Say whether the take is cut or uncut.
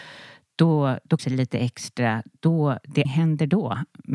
cut